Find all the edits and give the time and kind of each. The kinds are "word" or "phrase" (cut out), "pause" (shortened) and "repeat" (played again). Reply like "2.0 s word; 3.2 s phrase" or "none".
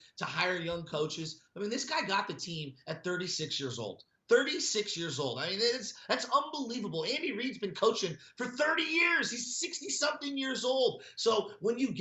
none